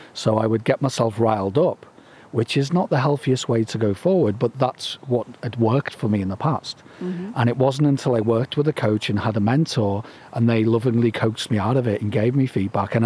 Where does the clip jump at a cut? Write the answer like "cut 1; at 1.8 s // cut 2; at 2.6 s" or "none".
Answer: none